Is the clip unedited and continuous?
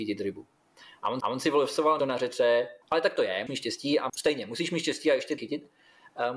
no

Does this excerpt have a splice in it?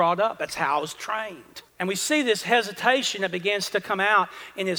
yes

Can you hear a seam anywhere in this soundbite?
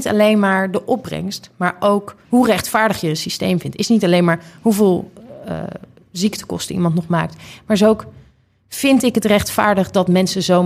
yes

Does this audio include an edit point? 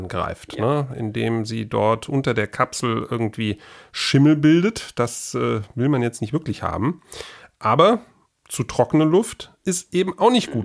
no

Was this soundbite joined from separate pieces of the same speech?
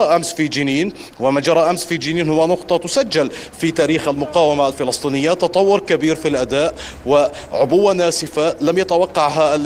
no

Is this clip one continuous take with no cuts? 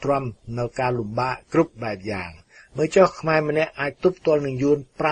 yes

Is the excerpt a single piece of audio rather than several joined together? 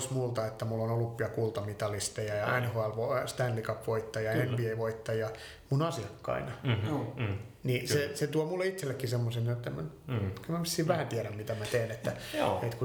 yes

